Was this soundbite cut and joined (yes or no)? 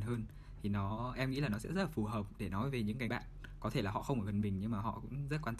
yes